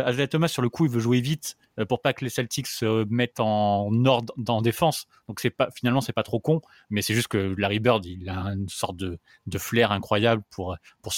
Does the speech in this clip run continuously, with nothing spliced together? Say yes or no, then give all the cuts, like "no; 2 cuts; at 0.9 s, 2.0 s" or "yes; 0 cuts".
yes; 0 cuts